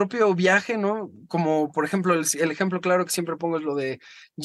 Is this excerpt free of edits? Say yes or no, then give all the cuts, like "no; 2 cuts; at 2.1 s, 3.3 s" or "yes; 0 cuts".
yes; 0 cuts